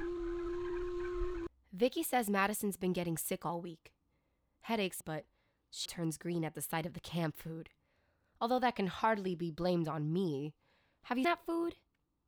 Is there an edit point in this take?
yes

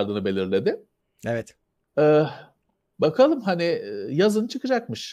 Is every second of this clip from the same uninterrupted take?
yes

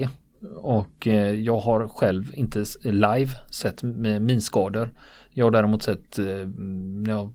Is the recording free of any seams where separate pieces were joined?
yes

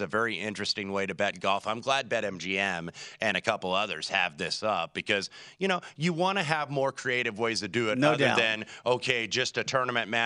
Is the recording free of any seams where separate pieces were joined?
yes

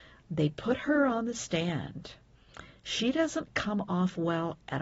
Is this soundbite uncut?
yes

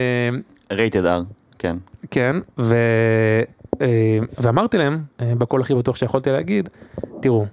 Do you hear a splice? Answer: yes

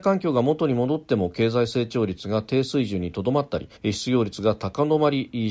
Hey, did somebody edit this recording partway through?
yes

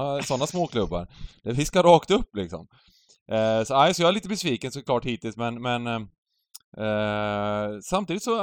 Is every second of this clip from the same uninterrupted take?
yes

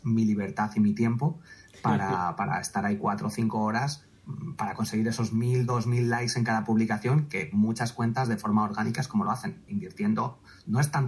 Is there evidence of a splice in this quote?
yes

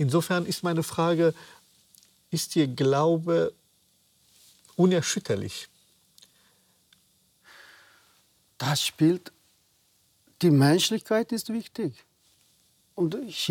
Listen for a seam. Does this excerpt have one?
no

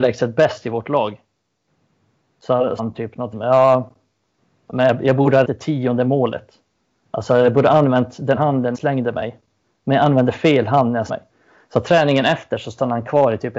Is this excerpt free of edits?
no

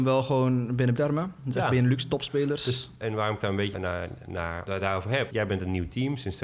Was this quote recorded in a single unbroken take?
no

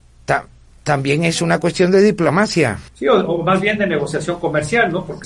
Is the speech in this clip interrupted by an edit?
yes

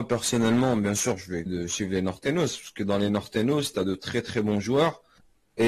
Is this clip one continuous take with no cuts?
no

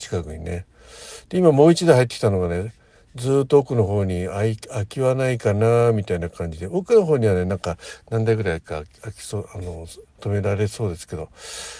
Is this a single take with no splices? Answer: yes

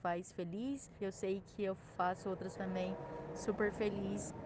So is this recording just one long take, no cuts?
no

